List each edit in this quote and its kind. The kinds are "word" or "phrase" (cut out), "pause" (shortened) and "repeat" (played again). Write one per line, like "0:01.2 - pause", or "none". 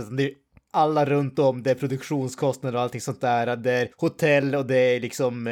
0:03.9 - pause